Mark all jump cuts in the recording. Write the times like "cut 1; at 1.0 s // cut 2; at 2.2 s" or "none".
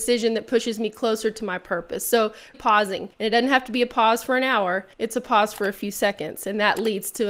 cut 1; at 2.5 s // cut 2; at 3.1 s // cut 3; at 4.9 s